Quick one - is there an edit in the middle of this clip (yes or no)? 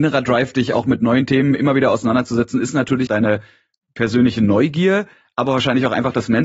yes